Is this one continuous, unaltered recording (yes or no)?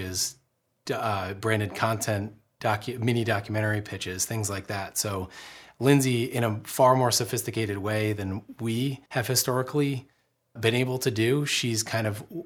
no